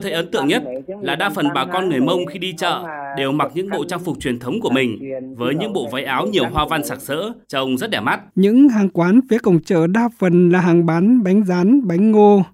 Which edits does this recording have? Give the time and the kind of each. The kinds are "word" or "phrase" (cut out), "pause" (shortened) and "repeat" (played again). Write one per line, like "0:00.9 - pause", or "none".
0:07.4 - pause
0:08.3 - pause